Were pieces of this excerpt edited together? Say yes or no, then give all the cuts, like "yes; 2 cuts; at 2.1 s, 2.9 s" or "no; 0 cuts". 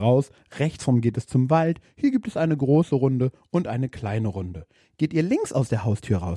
no; 0 cuts